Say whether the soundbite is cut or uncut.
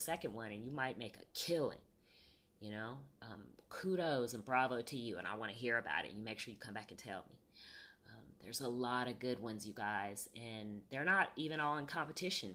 uncut